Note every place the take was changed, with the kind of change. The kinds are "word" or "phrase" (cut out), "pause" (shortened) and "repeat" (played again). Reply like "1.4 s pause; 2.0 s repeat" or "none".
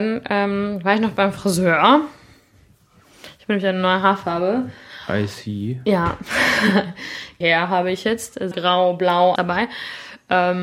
7.4 s word; 8.5 s word; 9.4 s word

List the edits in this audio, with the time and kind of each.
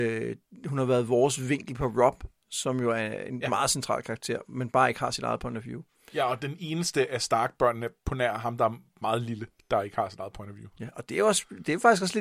none

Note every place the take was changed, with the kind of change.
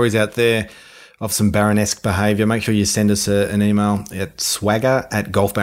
none

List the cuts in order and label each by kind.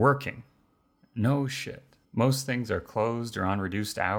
2.0 s pause

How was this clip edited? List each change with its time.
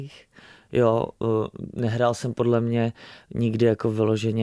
none

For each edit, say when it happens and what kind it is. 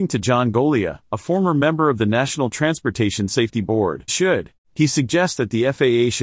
4.1 s word; 4.6 s pause

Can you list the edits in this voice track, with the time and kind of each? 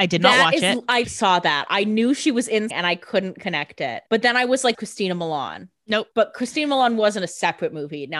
1.0 s word; 2.7 s word; 4.1 s pause; 4.7 s phrase; 6.1 s pause

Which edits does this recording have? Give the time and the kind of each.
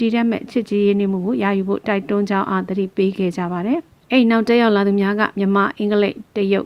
4.0 s pause

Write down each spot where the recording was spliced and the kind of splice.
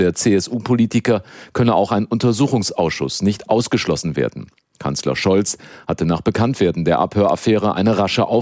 none

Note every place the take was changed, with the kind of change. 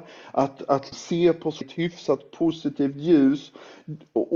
0.9 s word; 1.6 s phrase

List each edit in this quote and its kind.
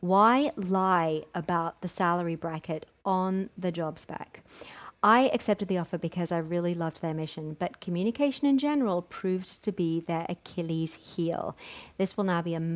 none

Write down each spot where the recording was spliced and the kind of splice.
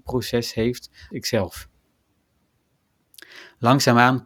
1.1 s word

